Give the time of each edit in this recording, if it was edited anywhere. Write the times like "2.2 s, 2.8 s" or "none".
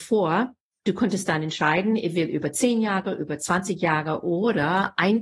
none